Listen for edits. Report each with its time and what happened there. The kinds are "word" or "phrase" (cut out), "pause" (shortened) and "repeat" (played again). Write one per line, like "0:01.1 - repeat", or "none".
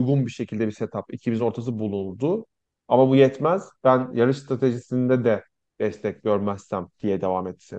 none